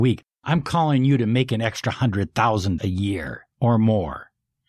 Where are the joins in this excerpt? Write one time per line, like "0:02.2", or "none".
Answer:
0:02.8
0:03.5